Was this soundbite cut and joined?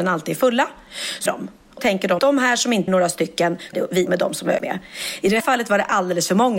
yes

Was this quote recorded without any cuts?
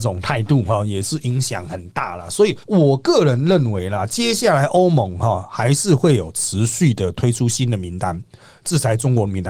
no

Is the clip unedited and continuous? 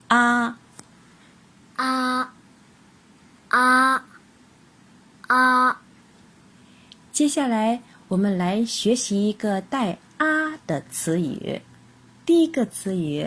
yes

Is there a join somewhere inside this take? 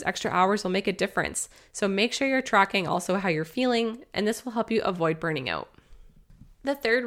no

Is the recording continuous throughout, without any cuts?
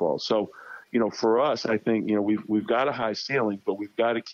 yes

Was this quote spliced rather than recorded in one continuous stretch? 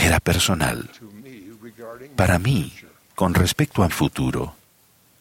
yes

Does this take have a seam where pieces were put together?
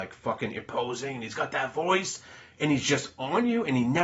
no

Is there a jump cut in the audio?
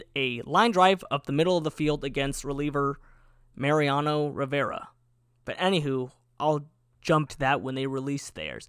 yes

